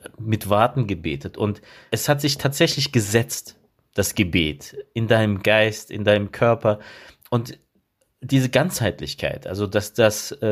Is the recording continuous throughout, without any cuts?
yes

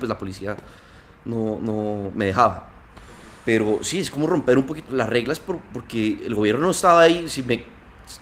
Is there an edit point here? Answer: yes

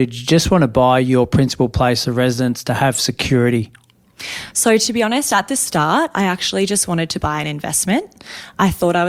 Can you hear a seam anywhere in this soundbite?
no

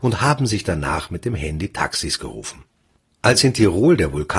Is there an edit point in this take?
no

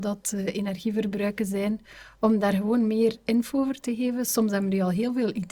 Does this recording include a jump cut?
no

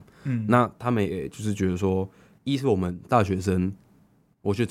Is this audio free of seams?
yes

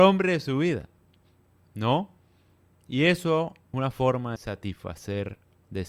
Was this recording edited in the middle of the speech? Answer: yes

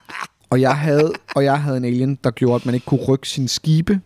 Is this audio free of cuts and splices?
yes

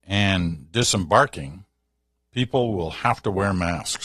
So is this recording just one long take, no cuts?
yes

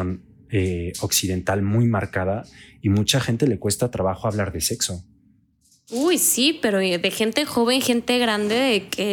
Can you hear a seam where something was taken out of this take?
no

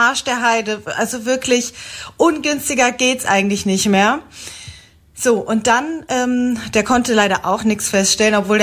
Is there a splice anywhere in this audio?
no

